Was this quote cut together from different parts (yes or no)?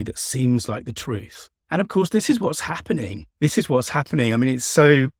yes